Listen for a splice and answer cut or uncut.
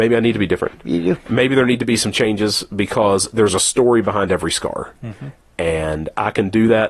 uncut